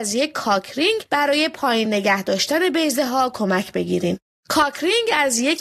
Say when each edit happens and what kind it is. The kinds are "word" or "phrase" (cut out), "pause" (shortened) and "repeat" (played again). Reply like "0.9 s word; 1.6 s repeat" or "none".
none